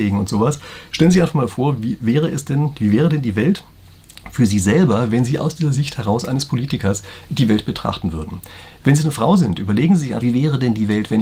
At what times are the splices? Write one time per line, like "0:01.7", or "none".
0:10.2